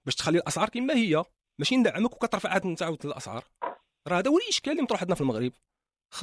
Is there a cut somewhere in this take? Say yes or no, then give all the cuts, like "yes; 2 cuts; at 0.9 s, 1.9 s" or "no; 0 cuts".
no; 0 cuts